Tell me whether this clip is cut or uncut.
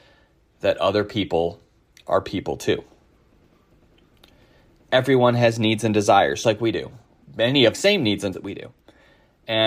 cut